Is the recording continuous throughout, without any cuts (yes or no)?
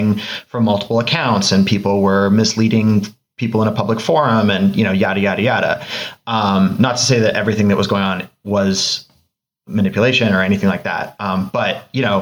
yes